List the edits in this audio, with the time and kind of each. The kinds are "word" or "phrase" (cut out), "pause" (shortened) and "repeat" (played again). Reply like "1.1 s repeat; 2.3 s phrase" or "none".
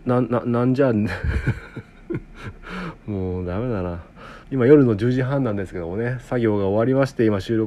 4.4 s pause